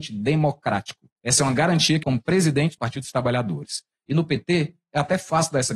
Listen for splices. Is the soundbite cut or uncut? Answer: cut